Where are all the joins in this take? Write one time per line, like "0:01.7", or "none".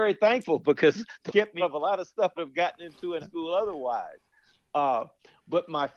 0:01.3
0:01.6
0:02.4
0:03.2